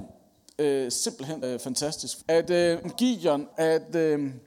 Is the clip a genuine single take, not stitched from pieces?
no; 4 cuts; at 1.4 s, 2.2 s, 2.8 s, 3.5 s

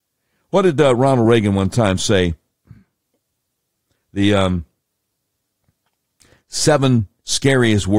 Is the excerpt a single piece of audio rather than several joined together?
yes; 0 cuts

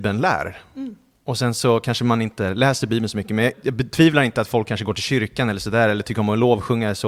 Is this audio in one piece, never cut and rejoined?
no; 1 cut; at 3.5 s

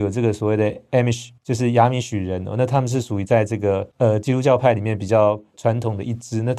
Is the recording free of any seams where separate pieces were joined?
no; 2 cuts; at 1.4 s, 3.9 s

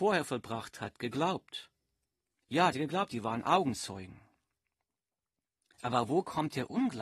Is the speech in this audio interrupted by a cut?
yes; 1 cut; at 2.7 s

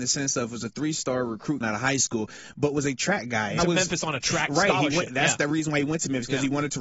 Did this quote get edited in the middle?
yes; 2 cuts; at 1.6 s, 3.6 s

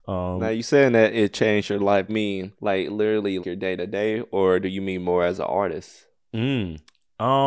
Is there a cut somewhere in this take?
yes; 3 cuts; at 2.1 s, 2.5 s, 3.4 s

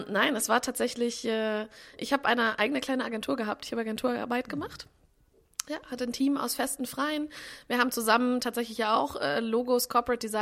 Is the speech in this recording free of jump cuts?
yes; 0 cuts

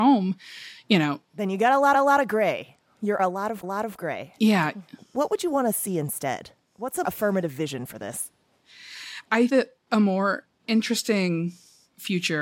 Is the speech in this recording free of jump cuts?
no; 6 cuts; at 1.2 s, 1.9 s, 3.2 s, 3.6 s, 7.0 s, 9.5 s

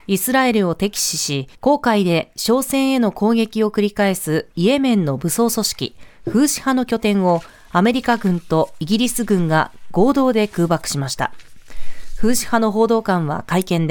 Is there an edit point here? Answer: yes; 1 cut; at 1.5 s

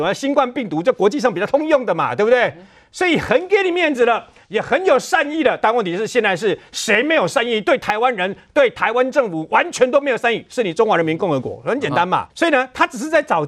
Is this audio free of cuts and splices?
no; 1 cut; at 12.3 s

